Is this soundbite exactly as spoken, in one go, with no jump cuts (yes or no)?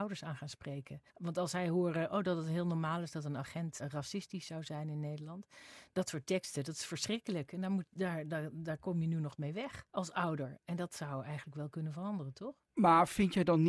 no